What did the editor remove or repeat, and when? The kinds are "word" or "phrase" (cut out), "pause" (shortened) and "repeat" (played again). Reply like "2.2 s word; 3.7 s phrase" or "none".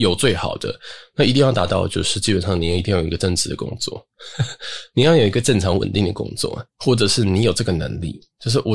6.7 s pause